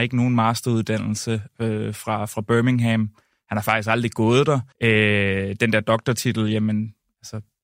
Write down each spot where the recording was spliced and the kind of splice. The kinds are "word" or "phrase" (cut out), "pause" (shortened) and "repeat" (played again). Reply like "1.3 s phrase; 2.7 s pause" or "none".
4.7 s pause